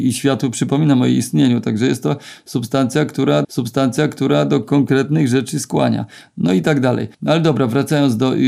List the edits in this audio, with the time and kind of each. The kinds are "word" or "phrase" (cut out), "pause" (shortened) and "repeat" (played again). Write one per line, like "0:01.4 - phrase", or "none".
0:03.4 - repeat
0:07.1 - pause